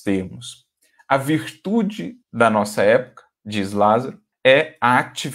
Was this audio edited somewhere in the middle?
yes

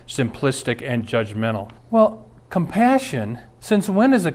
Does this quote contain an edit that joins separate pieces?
yes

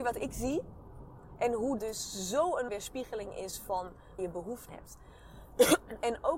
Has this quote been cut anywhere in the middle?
yes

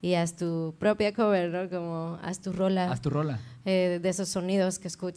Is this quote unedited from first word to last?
yes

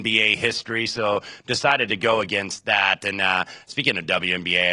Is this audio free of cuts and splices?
yes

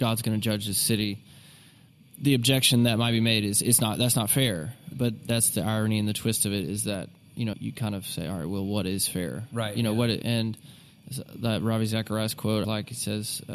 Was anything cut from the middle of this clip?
yes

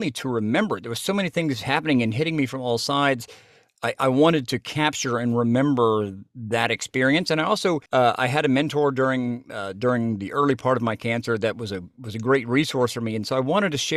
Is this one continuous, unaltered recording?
no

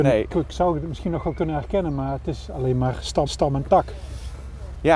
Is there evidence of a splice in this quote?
yes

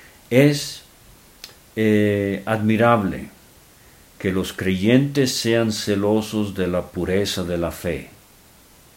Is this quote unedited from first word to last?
yes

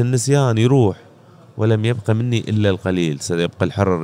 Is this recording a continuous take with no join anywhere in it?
yes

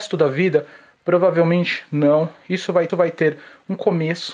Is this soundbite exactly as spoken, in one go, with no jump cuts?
no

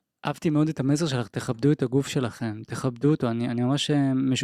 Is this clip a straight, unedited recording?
yes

